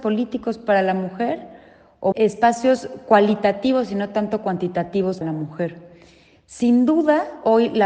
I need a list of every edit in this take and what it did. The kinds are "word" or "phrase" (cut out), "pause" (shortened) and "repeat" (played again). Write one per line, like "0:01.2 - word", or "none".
0:02.1 - word
0:05.2 - word